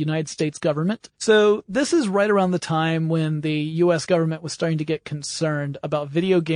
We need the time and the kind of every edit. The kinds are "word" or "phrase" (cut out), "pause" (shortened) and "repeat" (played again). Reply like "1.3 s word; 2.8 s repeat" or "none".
1.1 s pause

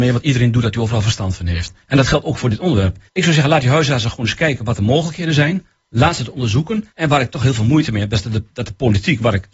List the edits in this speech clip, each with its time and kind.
1.8 s pause; 3.1 s pause; 6.9 s pause

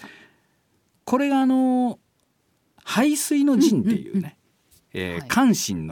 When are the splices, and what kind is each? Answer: none

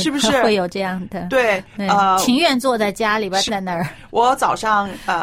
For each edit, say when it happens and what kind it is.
3.5 s word

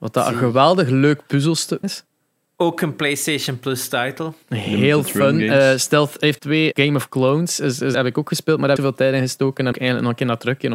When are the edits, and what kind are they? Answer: 1.8 s word; 4.4 s pause; 6.4 s phrase; 6.7 s word; 7.9 s word; 8.8 s phrase; 9.7 s word

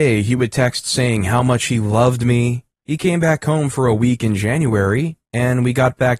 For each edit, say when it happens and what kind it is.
none

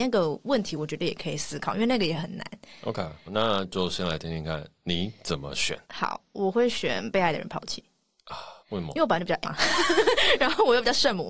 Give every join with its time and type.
3.3 s word; 5.8 s pause; 8.6 s pause; 9.4 s word

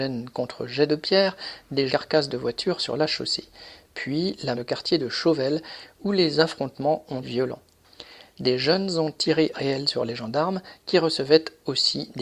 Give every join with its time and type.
1.9 s phrase; 4.5 s phrase; 7.2 s word; 9.5 s phrase

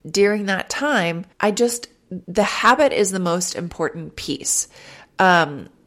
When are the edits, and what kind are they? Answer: 1.3 s pause; 2.2 s pause

